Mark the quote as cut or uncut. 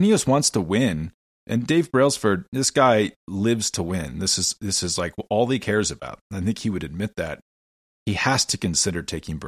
uncut